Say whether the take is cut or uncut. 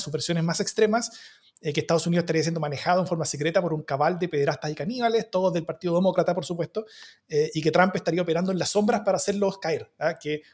uncut